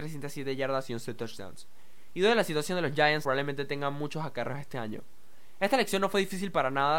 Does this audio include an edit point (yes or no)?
yes